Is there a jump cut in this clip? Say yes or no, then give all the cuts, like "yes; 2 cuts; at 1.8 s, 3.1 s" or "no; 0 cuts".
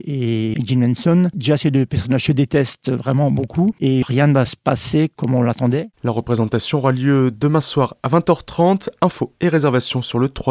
no; 0 cuts